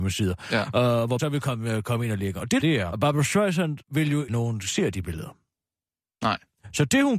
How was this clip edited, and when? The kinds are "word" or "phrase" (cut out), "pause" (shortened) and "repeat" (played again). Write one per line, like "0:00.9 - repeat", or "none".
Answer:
0:01.2 - word
0:02.6 - phrase
0:02.9 - word
0:03.8 - pause
0:04.3 - phrase